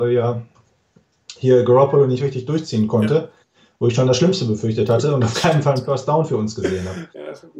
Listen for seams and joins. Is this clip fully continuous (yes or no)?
yes